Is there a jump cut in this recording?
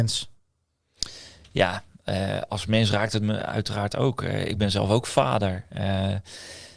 no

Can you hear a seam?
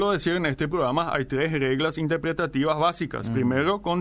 no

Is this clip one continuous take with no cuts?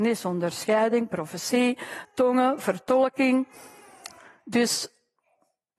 yes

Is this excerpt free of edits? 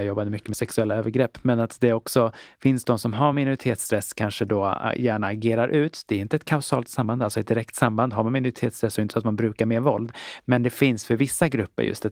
yes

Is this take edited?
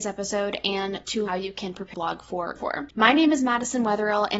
yes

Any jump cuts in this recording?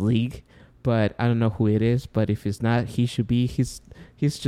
no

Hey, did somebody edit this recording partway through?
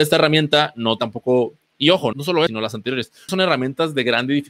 yes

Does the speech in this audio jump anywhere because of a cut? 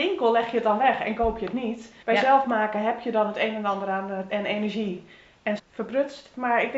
yes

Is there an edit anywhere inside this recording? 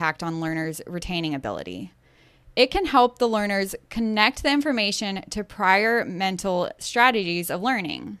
no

